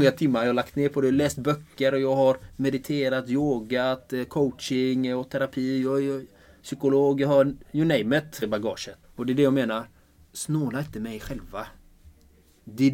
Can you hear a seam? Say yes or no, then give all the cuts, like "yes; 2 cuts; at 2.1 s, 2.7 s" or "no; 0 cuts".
yes; 2 cuts; at 8.4 s, 9.0 s